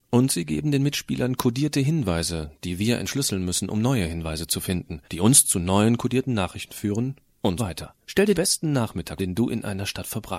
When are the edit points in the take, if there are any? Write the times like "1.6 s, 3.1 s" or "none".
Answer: 5.0 s, 7.6 s, 8.0 s, 8.3 s, 9.2 s